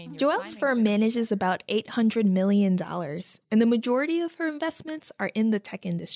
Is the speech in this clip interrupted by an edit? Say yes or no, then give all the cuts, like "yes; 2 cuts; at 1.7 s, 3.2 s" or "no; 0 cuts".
yes; 1 cut; at 3.4 s